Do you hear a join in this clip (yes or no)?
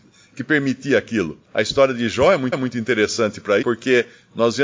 yes